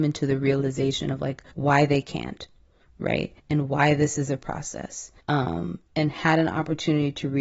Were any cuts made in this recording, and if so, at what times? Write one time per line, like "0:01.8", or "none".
0:01.5
0:03.4
0:05.2